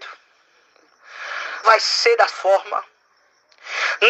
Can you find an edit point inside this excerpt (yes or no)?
yes